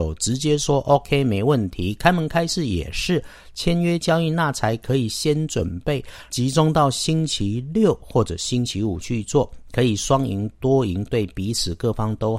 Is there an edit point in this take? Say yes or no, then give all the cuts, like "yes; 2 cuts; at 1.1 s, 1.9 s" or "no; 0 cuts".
yes; 1 cut; at 6.3 s